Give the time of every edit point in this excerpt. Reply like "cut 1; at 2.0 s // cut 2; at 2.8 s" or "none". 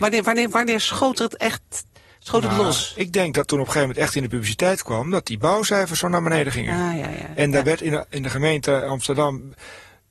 none